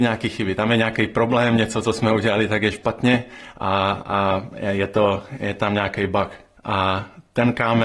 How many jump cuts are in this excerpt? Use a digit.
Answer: 1